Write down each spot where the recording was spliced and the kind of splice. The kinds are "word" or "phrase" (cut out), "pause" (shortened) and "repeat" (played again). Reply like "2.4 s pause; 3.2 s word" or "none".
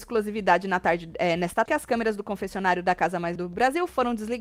1.7 s word; 3.4 s word